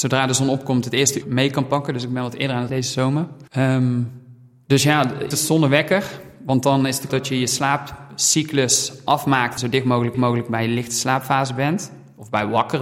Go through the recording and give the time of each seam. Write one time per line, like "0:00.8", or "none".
0:01.2
0:02.7
0:03.5
0:05.3
0:07.1
0:09.6
0:10.1